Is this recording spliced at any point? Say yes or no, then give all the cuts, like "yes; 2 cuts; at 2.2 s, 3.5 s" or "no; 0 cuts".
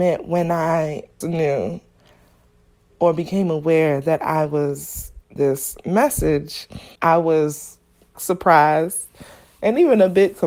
yes; 4 cuts; at 1.2 s, 5.4 s, 7.0 s, 8.1 s